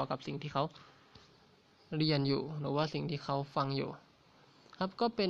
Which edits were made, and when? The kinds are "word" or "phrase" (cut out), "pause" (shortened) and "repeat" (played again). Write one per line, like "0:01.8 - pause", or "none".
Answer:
none